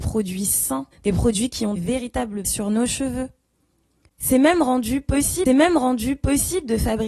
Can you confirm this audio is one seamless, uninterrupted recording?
no; 4 cuts; at 0.9 s, 1.8 s, 2.4 s, 5.5 s

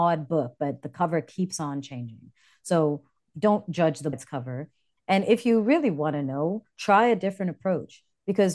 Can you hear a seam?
yes; 1 cut; at 4.1 s

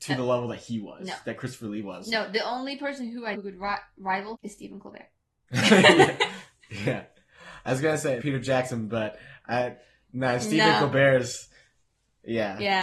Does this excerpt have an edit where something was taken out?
yes; 3 cuts; at 3.3 s, 4.3 s, 8.2 s

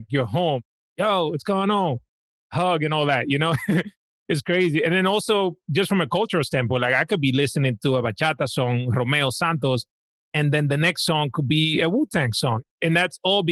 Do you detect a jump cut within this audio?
no; 0 cuts

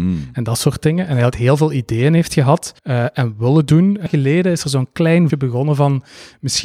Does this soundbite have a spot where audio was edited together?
yes; 4 cuts; at 1.3 s, 2.8 s, 4.1 s, 5.3 s

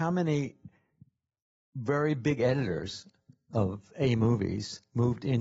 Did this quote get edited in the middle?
no; 0 cuts

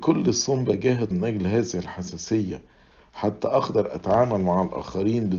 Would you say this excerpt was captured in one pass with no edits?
no; 1 cut; at 1.1 s

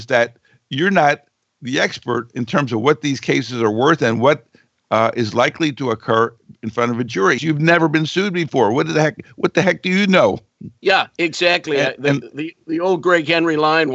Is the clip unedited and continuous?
no; 1 cut; at 7.4 s

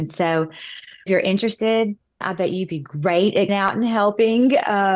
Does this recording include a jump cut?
yes; 3 cuts; at 1.1 s, 2.2 s, 3.5 s

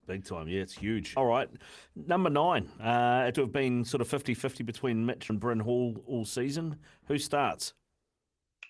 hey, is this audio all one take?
no; 3 cuts; at 1.2 s, 3.3 s, 5.3 s

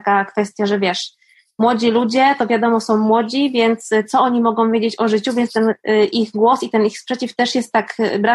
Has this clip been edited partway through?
no; 0 cuts

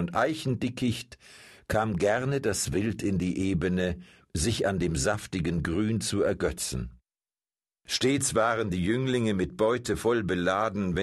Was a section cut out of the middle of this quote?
no; 0 cuts

